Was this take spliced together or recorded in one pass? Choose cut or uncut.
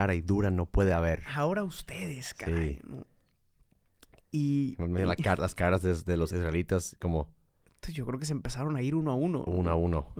uncut